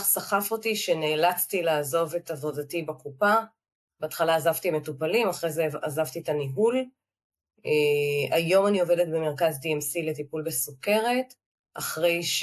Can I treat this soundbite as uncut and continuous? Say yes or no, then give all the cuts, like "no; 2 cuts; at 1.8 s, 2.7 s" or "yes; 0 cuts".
yes; 0 cuts